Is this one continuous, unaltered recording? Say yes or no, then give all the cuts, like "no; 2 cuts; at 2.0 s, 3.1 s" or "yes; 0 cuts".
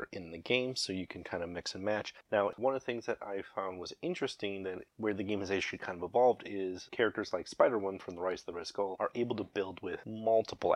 no; 1 cut; at 2.2 s